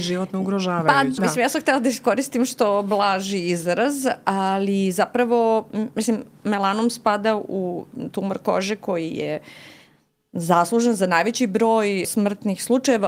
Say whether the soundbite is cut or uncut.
cut